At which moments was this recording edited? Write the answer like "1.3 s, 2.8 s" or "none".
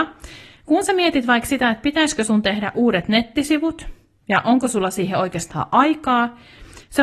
none